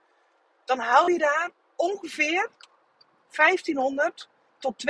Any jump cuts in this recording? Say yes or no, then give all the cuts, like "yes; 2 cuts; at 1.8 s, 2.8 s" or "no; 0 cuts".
no; 0 cuts